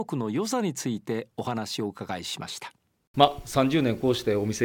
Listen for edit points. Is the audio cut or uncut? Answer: uncut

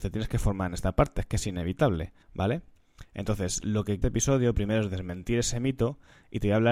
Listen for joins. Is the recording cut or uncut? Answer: cut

